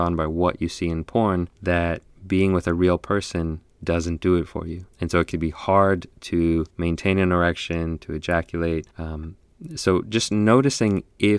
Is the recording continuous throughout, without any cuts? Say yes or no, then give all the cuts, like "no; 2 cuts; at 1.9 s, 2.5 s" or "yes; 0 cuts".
no; 5 cuts; at 1.5 s, 4.9 s, 5.3 s, 6.7 s, 8.9 s